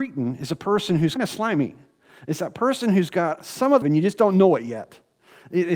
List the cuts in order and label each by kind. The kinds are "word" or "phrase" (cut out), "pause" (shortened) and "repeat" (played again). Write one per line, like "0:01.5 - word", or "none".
0:01.2 - word
0:03.8 - word